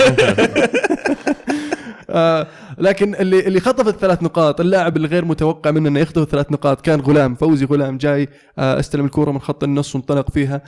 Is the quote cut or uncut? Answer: uncut